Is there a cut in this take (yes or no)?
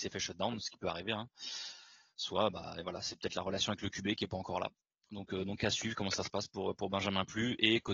no